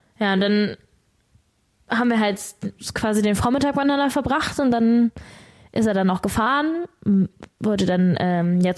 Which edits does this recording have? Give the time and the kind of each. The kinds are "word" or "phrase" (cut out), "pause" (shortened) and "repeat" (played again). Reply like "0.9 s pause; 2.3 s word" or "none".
none